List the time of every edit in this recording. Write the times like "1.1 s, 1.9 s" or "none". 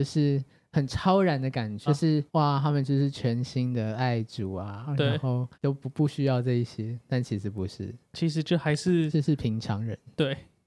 1.9 s, 2.3 s, 5.5 s